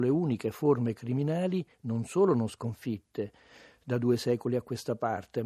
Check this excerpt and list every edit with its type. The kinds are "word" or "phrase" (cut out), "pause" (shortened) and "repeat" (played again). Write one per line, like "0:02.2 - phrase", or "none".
0:01.7 - pause